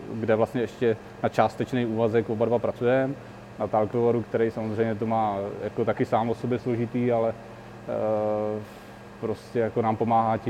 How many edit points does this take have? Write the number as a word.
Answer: one